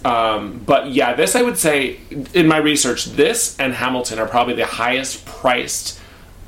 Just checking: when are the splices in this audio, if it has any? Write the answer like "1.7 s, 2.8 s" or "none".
none